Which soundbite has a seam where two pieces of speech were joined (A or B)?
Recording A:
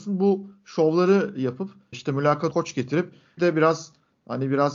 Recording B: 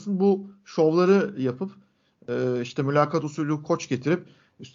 A